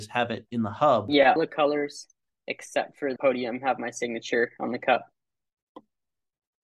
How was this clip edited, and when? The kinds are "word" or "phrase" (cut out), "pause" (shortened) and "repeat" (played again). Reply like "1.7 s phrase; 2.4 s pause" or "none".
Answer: 1.4 s phrase; 3.2 s word